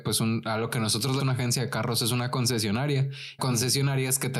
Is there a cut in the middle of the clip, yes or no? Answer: yes